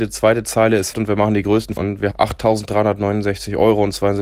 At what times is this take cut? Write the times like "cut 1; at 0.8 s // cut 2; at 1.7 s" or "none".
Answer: cut 1; at 0.9 s // cut 2; at 1.8 s // cut 3; at 2.1 s